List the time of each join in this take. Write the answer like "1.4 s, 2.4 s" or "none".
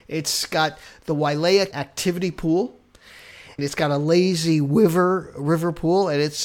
1.7 s, 3.6 s